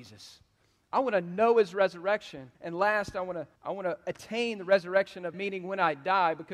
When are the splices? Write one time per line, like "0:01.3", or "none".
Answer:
0:02.5
0:03.6
0:05.3